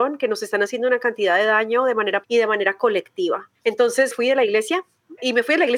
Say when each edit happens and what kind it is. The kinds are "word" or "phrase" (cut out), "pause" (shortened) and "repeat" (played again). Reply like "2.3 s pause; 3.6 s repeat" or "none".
2.2 s word; 4.1 s word